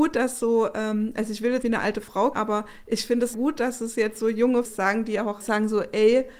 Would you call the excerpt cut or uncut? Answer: cut